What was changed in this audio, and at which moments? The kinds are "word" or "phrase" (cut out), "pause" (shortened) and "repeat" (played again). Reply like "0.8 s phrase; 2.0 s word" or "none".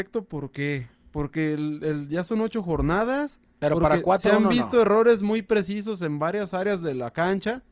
3.5 s pause